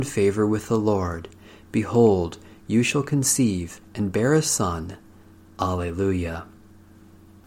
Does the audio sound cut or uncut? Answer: uncut